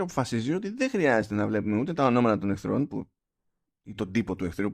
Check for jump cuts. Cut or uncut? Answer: uncut